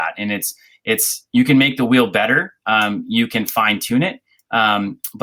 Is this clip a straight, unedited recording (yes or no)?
yes